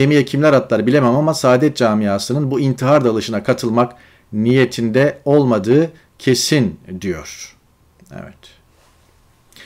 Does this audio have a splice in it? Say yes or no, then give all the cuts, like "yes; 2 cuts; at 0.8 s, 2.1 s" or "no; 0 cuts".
no; 0 cuts